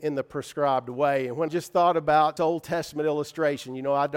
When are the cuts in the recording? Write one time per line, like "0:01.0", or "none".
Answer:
0:01.5
0:02.4